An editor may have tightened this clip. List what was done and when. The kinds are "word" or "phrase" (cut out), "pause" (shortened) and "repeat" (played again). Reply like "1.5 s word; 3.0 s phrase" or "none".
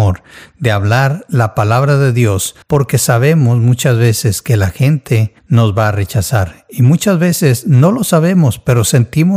2.6 s pause; 5.4 s pause